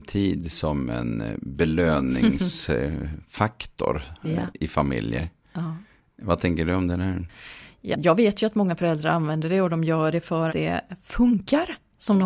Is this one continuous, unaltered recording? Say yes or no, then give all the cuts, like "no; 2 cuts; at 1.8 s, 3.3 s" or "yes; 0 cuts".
no; 2 cuts; at 7.9 s, 10.5 s